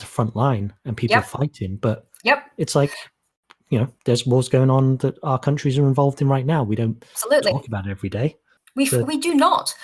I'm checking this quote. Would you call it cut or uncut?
uncut